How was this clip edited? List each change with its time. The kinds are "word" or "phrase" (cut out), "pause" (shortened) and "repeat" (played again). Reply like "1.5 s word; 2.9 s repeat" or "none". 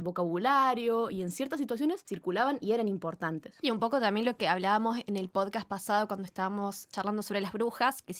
none